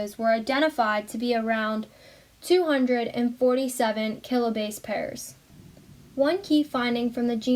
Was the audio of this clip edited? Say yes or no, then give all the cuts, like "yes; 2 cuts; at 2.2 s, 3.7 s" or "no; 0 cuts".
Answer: no; 0 cuts